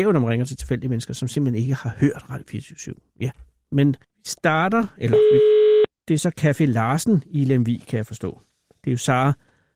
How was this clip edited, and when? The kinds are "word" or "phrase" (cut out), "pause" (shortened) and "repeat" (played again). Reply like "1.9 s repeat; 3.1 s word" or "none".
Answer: 4.0 s pause